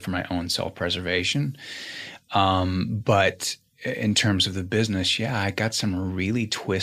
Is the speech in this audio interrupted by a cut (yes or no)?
no